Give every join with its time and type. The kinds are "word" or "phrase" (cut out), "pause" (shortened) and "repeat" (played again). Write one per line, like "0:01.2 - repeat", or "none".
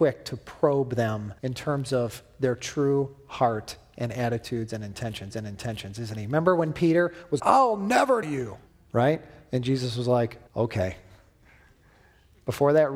0:01.4 - pause
0:05.3 - repeat
0:07.4 - word
0:08.2 - word
0:08.7 - pause
0:10.5 - pause